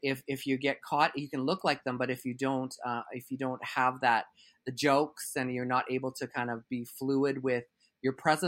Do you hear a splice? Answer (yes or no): no